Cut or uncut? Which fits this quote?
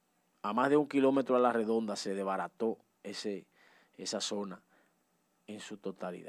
uncut